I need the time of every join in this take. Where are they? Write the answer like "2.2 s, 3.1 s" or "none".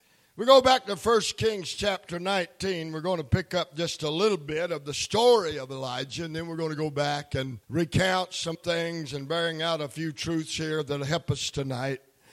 7.6 s, 8.5 s